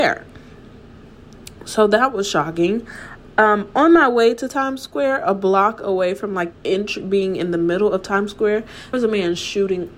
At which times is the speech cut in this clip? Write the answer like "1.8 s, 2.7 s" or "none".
6.5 s, 8.9 s